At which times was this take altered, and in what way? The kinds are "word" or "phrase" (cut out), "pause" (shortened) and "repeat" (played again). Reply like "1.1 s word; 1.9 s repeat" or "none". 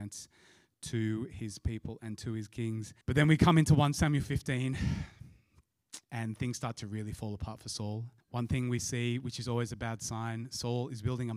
3.0 s pause; 6.0 s pause; 8.2 s pause